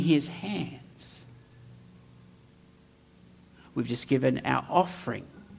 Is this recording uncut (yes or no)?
yes